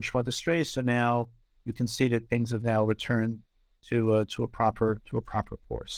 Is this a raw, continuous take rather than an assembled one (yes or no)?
yes